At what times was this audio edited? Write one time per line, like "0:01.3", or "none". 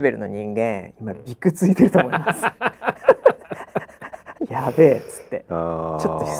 0:04.4